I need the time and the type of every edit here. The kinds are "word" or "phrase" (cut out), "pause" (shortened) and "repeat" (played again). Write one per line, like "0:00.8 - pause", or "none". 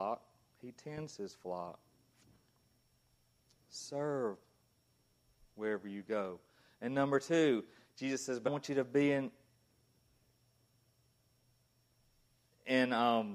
0:08.5 - word